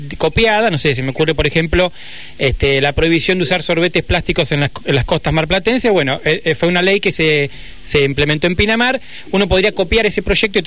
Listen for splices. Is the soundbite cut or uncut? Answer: uncut